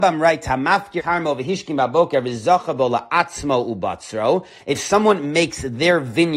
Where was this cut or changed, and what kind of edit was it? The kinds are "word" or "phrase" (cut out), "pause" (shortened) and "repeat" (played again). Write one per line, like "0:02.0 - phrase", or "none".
0:01.0 - word